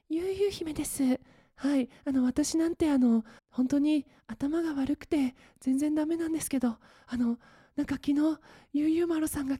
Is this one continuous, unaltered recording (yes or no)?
no